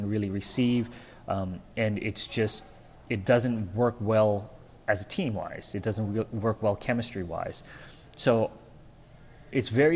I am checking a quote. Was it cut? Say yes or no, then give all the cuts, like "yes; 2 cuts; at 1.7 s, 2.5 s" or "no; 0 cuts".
no; 0 cuts